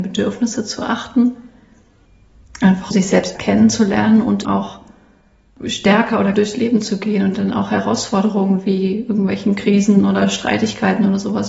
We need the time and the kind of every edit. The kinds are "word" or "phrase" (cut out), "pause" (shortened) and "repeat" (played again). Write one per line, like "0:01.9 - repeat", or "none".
0:02.9 - word
0:03.3 - word
0:04.4 - word
0:06.3 - word